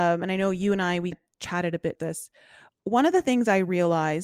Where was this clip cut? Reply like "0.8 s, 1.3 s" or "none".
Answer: 1.1 s, 1.9 s, 2.7 s